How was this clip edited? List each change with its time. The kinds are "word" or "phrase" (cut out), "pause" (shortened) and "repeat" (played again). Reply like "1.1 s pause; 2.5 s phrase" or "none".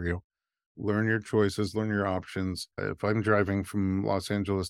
2.7 s pause